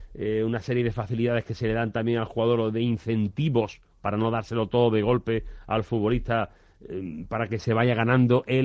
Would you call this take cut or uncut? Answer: uncut